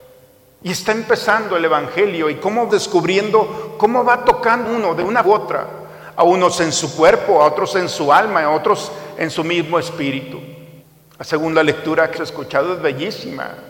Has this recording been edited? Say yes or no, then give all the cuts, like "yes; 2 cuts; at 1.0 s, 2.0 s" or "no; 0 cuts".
yes; 5 cuts; at 2.7 s, 4.6 s, 5.2 s, 10.8 s, 12.1 s